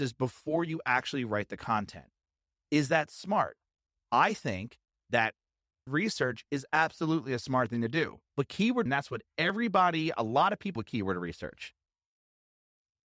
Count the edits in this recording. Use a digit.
4